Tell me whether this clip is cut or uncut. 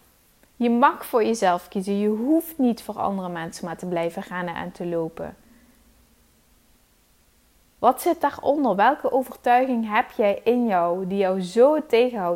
uncut